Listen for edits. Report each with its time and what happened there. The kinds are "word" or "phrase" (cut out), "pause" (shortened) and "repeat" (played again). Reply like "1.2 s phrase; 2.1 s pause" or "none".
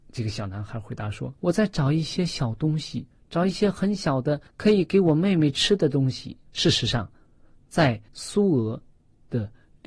1.4 s pause; 3.1 s pause; 4.5 s pause; 6.5 s pause; 8.1 s pause